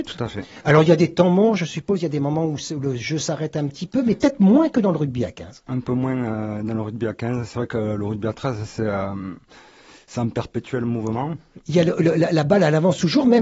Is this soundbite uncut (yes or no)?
yes